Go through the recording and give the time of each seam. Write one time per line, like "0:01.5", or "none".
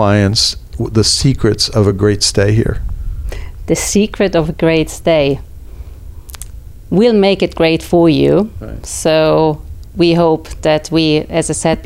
none

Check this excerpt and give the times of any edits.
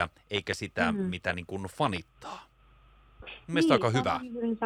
none

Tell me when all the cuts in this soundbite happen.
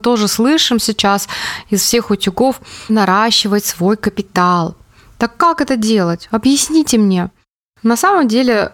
0:02.9

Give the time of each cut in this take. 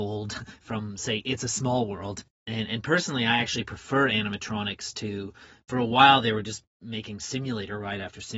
none

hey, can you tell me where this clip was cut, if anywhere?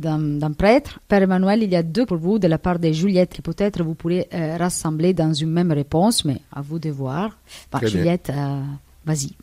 0:01.0
0:02.1
0:03.3

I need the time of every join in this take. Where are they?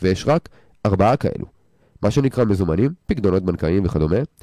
none

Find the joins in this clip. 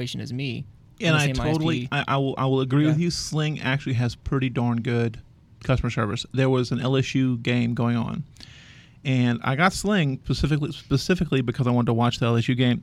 none

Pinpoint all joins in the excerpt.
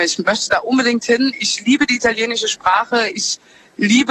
none

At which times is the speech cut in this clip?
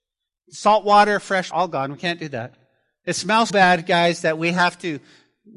0:01.5
0:03.5

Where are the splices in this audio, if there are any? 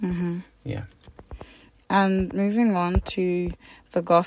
none

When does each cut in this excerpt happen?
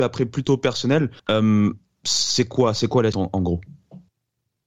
0:01.2
0:03.1

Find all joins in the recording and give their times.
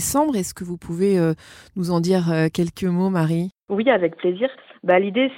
none

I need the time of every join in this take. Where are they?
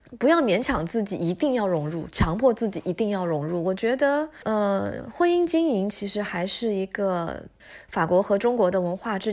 none

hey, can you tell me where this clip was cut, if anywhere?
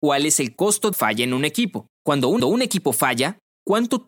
0:00.9
0:01.9
0:02.4

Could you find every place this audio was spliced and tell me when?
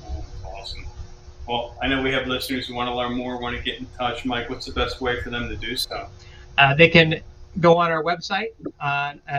none

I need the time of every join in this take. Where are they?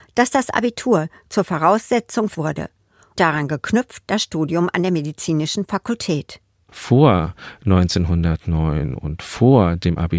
0:02.3
0:03.2

